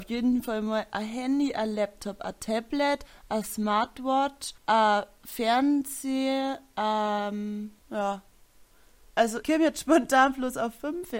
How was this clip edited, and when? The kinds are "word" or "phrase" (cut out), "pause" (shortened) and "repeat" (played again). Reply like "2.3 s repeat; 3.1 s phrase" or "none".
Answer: 4.6 s pause; 7.8 s pause; 9.4 s word